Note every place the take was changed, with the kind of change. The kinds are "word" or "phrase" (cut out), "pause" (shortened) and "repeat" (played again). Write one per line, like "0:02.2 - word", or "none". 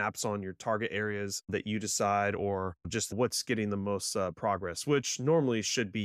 0:01.4 - pause
0:02.8 - pause